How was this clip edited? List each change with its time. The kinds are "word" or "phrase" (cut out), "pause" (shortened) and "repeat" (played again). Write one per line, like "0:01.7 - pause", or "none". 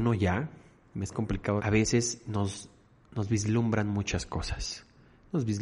0:01.6 - phrase